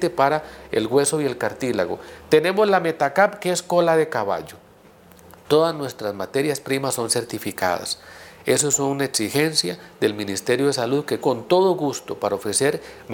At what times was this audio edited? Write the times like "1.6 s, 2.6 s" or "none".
11.2 s